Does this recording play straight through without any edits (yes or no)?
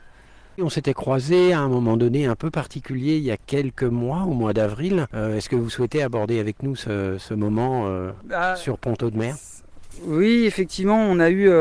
yes